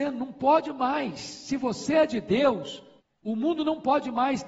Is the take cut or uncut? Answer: cut